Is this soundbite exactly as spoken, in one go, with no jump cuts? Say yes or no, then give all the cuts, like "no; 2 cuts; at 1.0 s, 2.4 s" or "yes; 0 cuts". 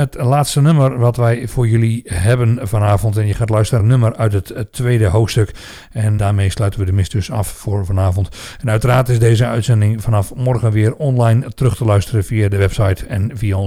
no; 2 cuts; at 3.8 s, 6.2 s